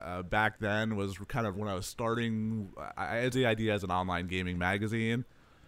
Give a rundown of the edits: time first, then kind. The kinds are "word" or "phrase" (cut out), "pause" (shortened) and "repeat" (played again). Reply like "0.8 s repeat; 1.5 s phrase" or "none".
1.5 s word; 3.3 s word